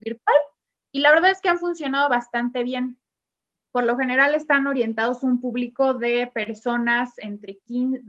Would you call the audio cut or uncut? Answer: uncut